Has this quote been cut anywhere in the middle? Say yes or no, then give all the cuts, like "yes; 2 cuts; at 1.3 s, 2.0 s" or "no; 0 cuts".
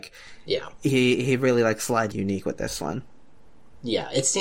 yes; 1 cut; at 2.1 s